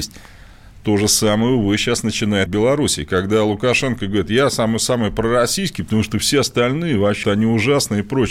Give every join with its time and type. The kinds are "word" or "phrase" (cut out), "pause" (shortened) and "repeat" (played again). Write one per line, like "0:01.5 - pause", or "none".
0:02.5 - phrase
0:07.2 - word